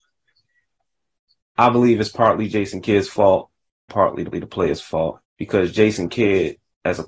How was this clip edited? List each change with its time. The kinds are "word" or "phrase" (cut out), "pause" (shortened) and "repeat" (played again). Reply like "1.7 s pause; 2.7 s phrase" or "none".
3.9 s word; 4.3 s repeat; 5.2 s pause